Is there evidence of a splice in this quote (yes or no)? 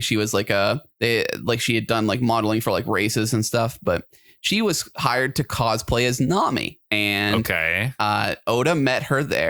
yes